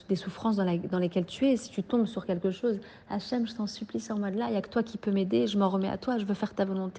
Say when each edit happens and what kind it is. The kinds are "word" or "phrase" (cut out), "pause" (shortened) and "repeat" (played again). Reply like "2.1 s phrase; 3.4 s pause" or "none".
none